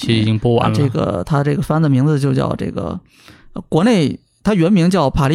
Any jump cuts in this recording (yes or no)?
no